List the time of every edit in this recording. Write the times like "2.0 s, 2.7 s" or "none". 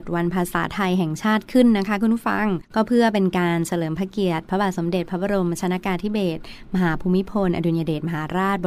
2.6 s